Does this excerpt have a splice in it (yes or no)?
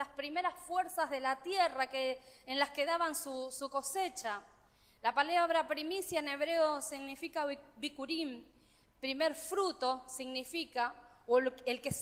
no